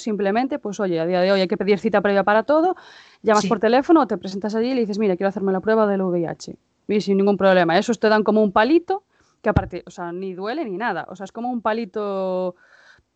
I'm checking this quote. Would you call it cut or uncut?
uncut